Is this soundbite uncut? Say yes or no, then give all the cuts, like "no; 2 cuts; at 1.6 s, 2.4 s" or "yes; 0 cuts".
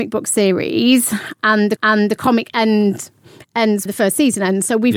no; 2 cuts; at 1.8 s, 3.9 s